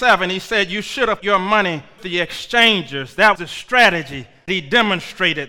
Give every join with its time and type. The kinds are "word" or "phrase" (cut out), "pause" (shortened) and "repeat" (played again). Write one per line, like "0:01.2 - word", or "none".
0:01.2 - word
0:02.0 - word
0:03.4 - word
0:04.5 - word